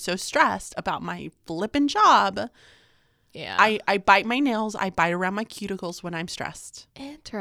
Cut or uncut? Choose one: uncut